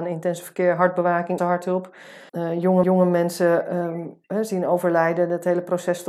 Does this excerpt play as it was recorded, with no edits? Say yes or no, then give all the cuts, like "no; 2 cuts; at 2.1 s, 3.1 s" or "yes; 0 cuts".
no; 4 cuts; at 1.4 s, 2.3 s, 2.8 s, 4.2 s